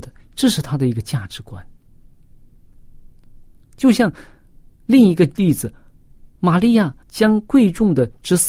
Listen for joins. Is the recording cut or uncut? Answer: cut